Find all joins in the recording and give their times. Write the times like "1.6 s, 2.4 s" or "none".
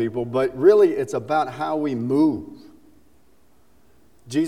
none